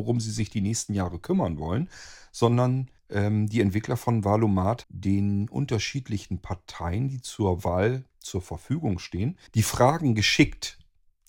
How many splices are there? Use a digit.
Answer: 3